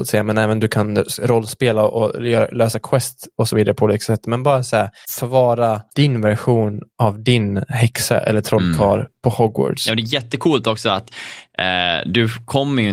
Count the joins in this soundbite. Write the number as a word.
one